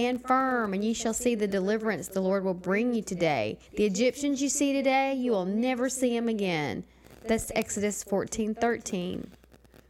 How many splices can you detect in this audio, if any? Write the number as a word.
one